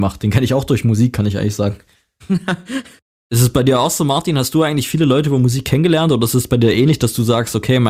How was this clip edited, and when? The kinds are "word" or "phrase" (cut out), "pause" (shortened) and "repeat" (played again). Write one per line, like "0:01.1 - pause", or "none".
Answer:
none